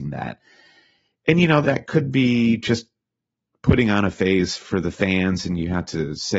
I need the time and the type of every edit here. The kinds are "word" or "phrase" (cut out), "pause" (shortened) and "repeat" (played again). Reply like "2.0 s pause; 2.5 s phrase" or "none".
1.6 s word